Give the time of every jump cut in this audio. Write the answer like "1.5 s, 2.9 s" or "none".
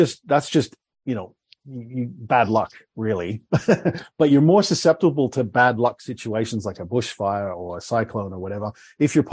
none